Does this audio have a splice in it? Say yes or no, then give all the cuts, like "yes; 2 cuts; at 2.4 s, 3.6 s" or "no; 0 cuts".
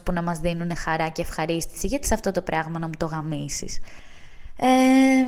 yes; 1 cut; at 2.0 s